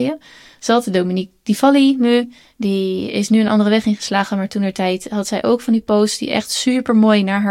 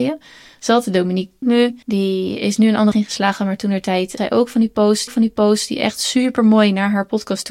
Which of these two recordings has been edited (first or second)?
second